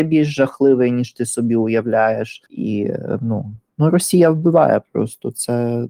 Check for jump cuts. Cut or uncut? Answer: cut